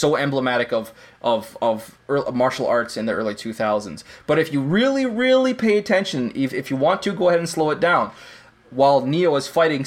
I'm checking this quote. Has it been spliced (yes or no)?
no